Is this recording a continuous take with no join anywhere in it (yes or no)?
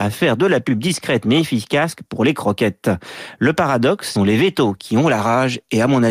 no